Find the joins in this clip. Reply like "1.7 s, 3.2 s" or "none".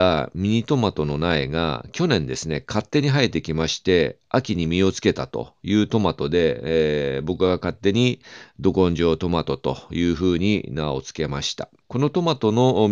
none

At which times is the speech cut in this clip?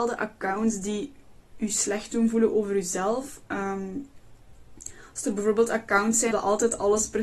6.3 s

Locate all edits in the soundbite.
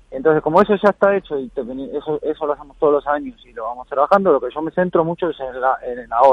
none

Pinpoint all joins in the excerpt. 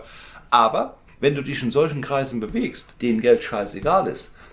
1.1 s, 2.9 s

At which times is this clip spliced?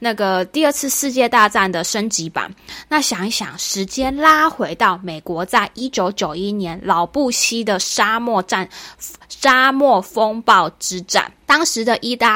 11.4 s

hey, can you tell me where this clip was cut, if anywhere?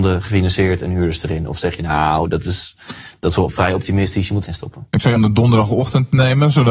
4.4 s, 5.2 s

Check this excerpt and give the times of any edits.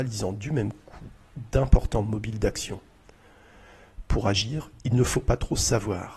none

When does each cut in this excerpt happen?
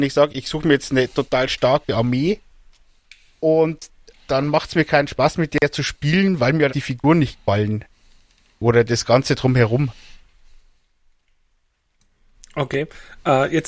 6.7 s

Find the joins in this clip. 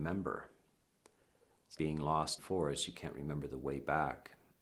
1.8 s, 2.4 s

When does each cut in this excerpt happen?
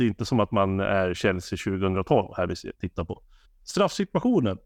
3.4 s

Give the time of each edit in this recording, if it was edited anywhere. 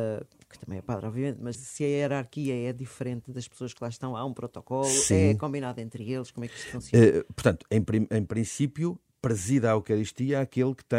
1.5 s

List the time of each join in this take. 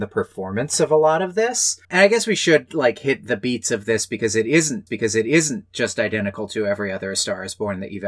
1.8 s, 4.9 s

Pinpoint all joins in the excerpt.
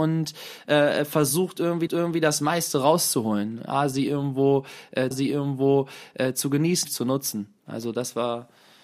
1.9 s, 5.1 s, 6.8 s

